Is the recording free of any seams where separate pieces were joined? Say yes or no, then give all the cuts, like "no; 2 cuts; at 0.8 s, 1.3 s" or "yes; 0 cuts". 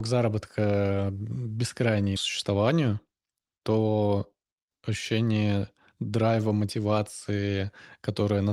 no; 2 cuts; at 2.2 s, 4.7 s